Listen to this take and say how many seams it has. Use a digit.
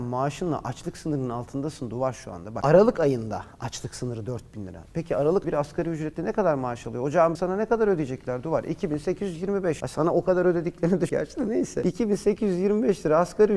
3